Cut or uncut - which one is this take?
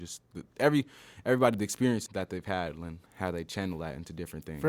cut